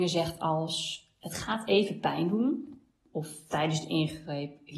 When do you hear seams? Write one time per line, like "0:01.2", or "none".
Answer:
none